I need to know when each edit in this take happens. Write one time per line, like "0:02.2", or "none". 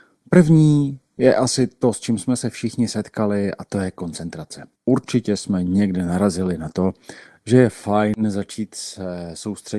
0:04.8